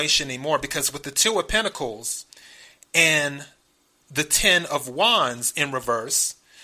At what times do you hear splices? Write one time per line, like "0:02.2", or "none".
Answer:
none